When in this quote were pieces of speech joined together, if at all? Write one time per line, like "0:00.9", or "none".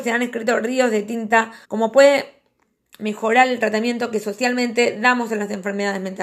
0:01.6

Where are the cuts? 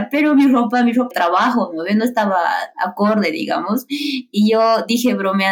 0:01.1

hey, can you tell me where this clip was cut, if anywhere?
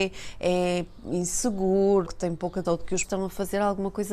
0:02.0
0:02.6
0:03.0

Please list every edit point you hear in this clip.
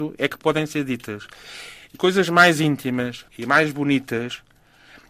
0:01.9
0:03.3

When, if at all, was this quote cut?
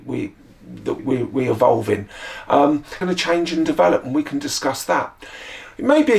0:01.0
0:03.0

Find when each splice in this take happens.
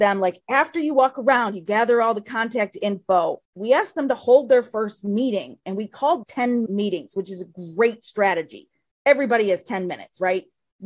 0:03.4
0:06.2
0:06.7

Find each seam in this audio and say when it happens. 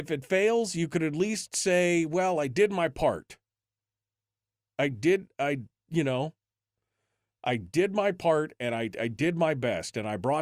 none

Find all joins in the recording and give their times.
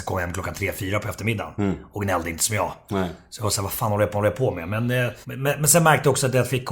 0:04.1
0:05.2

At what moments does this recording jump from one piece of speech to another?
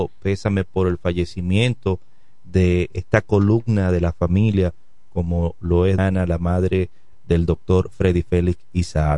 0:06.0

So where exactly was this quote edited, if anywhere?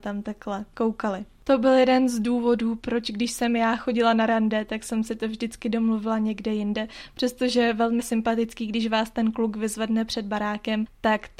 0:08.0

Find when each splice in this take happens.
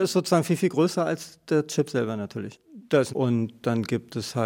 0:03.1

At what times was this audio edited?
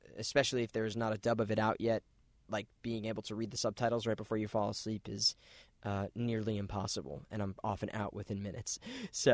none

